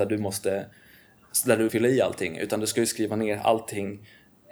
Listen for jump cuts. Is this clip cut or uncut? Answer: cut